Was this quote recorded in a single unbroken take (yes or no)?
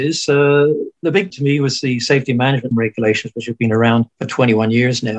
no